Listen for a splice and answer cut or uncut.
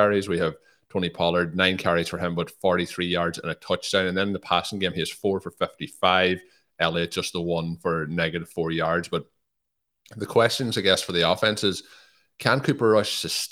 uncut